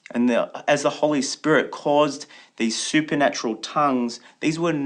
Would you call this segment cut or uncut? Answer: uncut